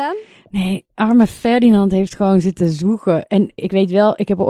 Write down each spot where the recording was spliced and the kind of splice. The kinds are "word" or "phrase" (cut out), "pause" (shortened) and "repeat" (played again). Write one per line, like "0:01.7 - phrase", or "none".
0:03.6 - word